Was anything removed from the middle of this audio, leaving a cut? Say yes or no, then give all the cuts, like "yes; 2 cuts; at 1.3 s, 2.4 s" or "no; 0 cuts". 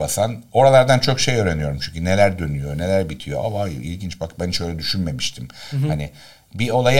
no; 0 cuts